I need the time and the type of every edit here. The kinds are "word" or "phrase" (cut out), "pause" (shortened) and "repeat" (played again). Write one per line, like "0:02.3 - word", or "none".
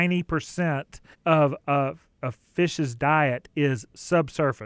0:01.1 - pause

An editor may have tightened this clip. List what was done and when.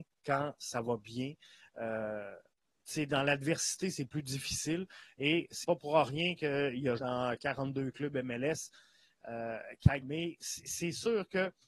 0:05.6 - word
0:07.0 - word
0:10.0 - word

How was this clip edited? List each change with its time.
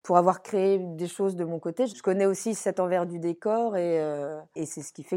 none

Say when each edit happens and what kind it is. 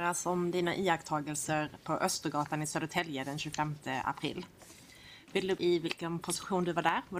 0:05.6 - word

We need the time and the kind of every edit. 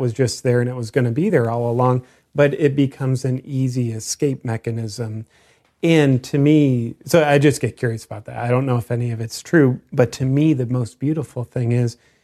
none

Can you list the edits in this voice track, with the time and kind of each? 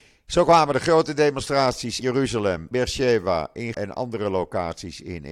0:02.0 - word
0:02.7 - word
0:03.7 - word

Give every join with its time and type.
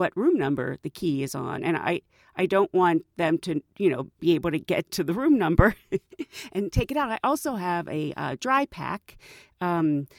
0:04.1 - pause

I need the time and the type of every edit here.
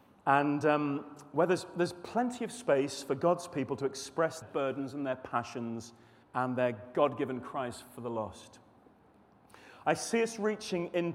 0:04.4 - word
0:06.2 - pause

